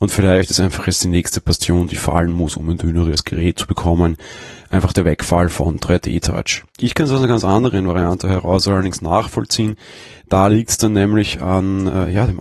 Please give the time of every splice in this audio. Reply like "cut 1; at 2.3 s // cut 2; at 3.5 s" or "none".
cut 1; at 6.7 s